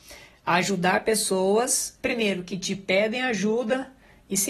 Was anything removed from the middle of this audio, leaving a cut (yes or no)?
yes